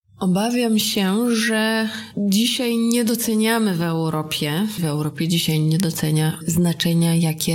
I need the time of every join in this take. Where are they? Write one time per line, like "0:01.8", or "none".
0:04.8